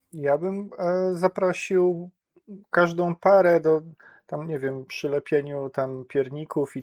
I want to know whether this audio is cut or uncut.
uncut